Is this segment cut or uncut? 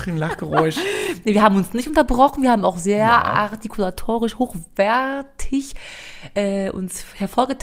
uncut